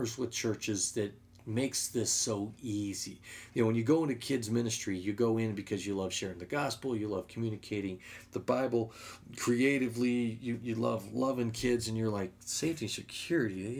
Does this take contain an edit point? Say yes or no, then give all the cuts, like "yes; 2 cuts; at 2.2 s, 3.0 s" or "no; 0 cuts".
no; 0 cuts